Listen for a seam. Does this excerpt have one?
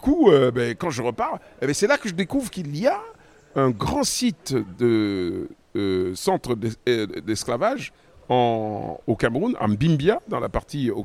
no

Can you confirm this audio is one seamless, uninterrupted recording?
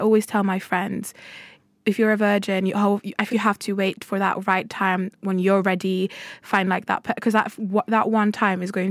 no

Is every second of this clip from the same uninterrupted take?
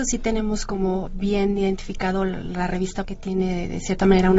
no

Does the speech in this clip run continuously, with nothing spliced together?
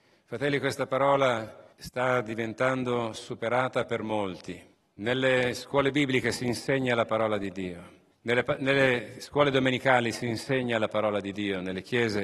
no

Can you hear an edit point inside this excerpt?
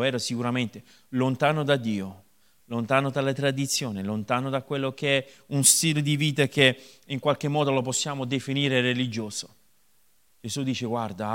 no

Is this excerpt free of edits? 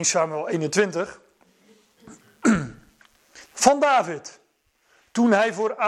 no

